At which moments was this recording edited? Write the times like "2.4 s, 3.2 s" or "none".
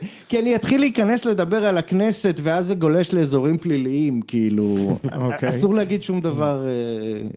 none